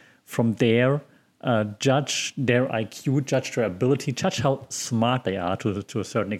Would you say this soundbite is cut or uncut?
uncut